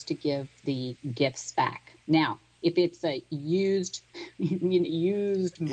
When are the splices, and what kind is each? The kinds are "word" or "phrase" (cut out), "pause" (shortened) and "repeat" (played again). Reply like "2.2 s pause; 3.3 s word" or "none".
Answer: 2.0 s pause